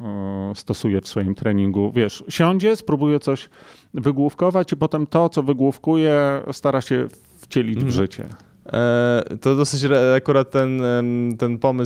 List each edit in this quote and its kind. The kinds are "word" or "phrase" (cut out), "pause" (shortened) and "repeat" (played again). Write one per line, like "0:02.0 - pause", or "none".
none